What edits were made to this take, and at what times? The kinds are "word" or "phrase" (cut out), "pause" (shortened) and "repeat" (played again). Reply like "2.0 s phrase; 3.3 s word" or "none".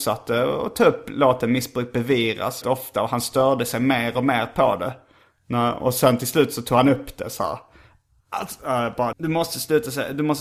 2.6 s word; 9.1 s word